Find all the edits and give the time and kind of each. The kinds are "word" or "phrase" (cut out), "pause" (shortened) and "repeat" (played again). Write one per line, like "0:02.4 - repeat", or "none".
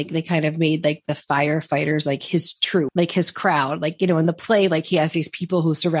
none